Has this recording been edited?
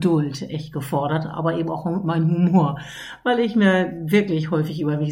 no; 0 cuts

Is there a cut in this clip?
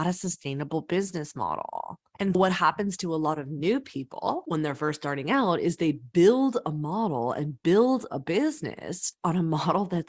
yes; 1 cut; at 2.3 s

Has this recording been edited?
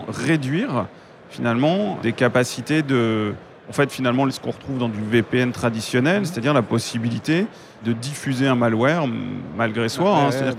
no; 0 cuts

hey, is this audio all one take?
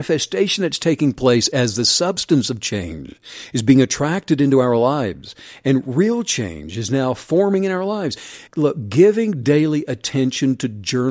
no; 1 cut; at 8.5 s

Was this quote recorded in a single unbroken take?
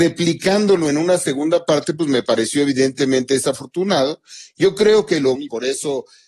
no; 1 cut; at 5.3 s

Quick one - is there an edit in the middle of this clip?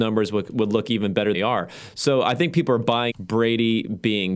yes; 2 cuts; at 1.3 s, 3.1 s

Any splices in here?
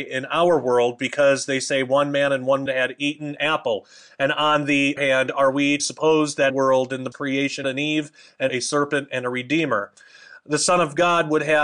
yes; 8 cuts; at 2.7 s, 3.4 s, 5.0 s, 5.8 s, 6.5 s, 7.1 s, 7.6 s, 8.5 s

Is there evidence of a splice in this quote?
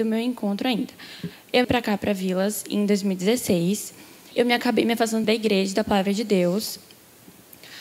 yes; 3 cuts; at 1.6 s, 4.3 s, 5.2 s

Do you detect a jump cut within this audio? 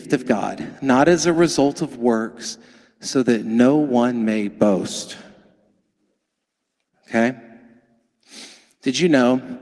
no; 0 cuts

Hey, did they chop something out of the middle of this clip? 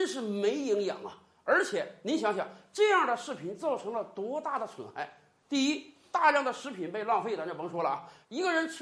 no; 0 cuts

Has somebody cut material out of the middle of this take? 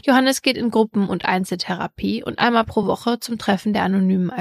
no; 0 cuts

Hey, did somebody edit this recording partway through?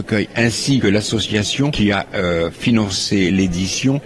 no; 0 cuts

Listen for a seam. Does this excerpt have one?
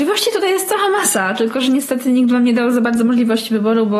no; 0 cuts

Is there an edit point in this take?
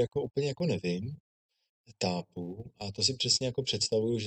no; 0 cuts

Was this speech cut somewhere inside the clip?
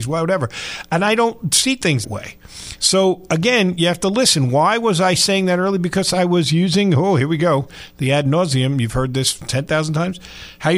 yes; 1 cut; at 2.0 s

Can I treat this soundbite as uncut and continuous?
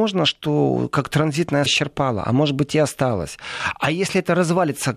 no; 1 cut; at 1.7 s

